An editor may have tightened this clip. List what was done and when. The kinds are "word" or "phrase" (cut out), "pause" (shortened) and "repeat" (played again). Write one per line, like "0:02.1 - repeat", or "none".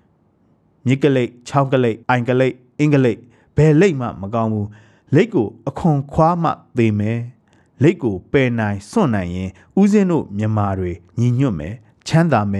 0:02.0 - pause